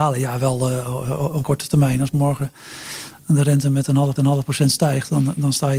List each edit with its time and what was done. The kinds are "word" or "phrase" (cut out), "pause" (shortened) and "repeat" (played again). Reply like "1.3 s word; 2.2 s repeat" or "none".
1.4 s word; 4.2 s repeat